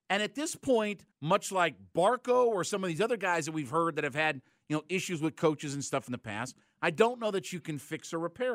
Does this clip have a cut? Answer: yes; 1 cut; at 1.1 s

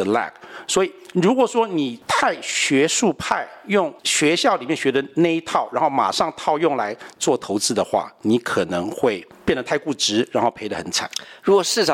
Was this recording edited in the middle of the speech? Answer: yes; 1 cut; at 4.0 s

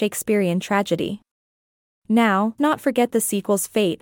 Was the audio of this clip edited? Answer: yes; 1 cut; at 2.6 s

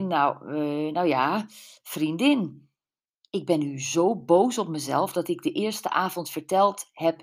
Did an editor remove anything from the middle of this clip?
no; 0 cuts

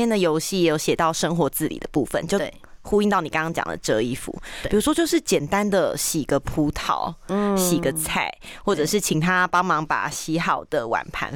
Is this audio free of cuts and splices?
yes; 0 cuts

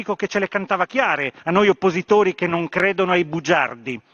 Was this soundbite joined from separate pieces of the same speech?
yes; 1 cut; at 1.4 s

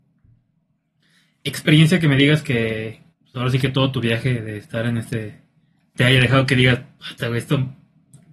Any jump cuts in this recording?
yes; 2 cuts; at 3.1 s, 6.0 s

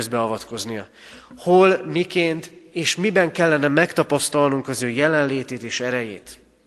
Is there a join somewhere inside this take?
no; 0 cuts

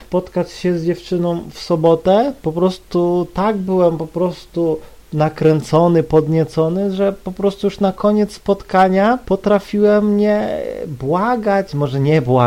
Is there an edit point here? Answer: no; 0 cuts

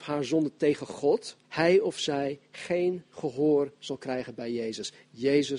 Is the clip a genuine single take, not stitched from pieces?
no; 1 cut; at 1.4 s

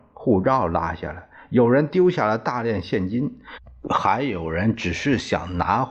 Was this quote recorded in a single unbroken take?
yes; 0 cuts

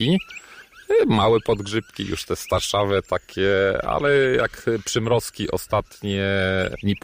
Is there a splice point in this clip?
no; 0 cuts

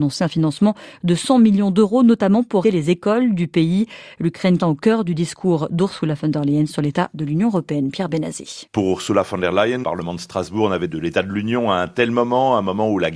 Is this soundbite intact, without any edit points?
no; 5 cuts; at 2.6 s, 4.6 s, 8.7 s, 9.8 s, 10.9 s

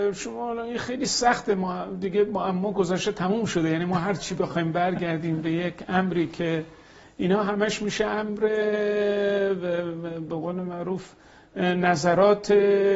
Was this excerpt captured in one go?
yes; 0 cuts

